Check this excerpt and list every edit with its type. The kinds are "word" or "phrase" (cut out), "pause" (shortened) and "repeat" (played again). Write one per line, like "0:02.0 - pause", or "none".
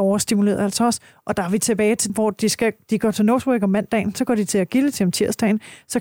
0:02.1 - word